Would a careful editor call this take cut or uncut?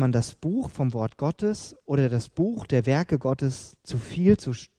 uncut